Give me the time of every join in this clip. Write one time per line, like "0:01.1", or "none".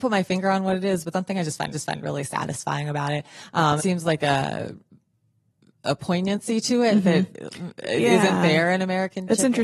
0:01.1
0:01.7
0:03.8
0:07.3